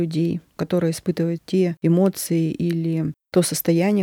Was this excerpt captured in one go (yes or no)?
no